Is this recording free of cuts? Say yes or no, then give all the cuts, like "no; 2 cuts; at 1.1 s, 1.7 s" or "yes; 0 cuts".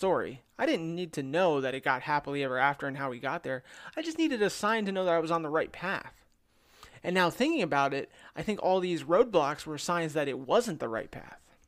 yes; 0 cuts